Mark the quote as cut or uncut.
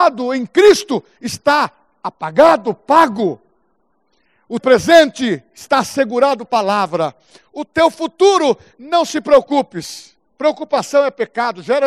cut